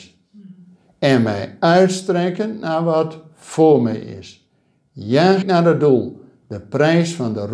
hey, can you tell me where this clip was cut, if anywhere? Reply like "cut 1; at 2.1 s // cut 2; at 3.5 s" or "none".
cut 1; at 5.4 s

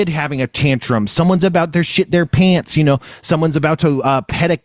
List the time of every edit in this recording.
none

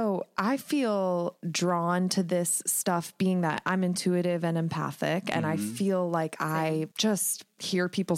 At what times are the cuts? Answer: cut 1; at 1.4 s // cut 2; at 6.9 s

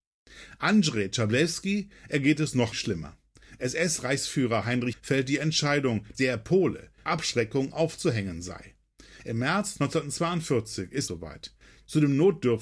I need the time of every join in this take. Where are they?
cut 1; at 2.7 s // cut 2; at 4.9 s // cut 3; at 6.1 s // cut 4; at 7.1 s // cut 5; at 11.1 s

